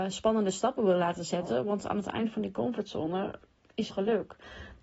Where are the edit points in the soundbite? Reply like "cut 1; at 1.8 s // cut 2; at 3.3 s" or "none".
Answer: cut 1; at 3.9 s